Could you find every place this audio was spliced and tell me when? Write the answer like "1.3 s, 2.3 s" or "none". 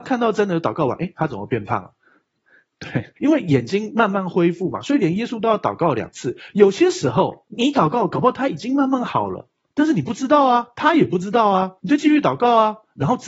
3.2 s, 7.5 s, 9.7 s, 11.8 s